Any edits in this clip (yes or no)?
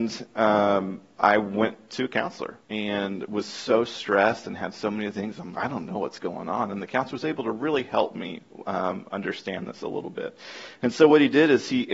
yes